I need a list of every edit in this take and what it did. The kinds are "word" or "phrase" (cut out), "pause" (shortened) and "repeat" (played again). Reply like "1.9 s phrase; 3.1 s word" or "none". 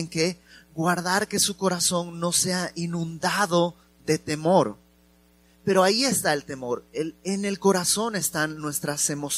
none